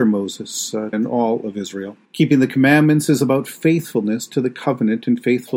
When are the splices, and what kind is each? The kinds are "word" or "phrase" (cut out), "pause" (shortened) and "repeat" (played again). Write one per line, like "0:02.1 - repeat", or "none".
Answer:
0:00.9 - phrase
0:02.0 - pause